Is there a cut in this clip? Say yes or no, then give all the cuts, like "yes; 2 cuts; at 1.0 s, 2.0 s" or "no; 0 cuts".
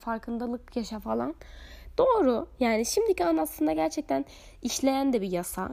no; 0 cuts